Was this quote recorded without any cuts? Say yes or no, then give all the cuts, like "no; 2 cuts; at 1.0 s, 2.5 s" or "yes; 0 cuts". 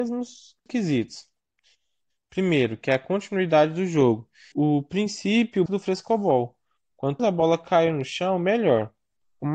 no; 3 cuts; at 4.5 s, 5.7 s, 7.2 s